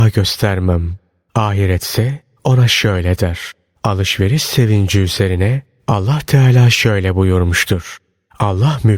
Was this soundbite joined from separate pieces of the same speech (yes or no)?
no